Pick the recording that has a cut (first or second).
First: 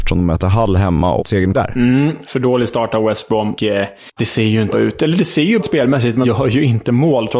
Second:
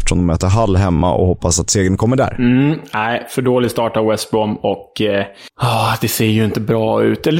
first